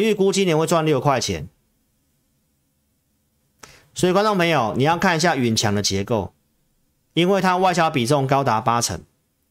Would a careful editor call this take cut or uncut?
uncut